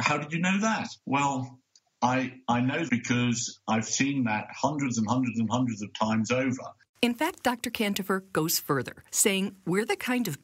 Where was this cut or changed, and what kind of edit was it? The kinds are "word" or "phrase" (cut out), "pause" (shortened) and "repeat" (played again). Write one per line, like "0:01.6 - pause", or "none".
0:01.0 - pause
0:02.9 - word
0:06.9 - pause